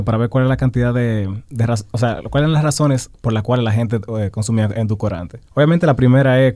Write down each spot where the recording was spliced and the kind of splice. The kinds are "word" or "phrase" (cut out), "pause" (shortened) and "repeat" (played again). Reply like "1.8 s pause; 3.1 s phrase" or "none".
3.1 s pause; 5.5 s pause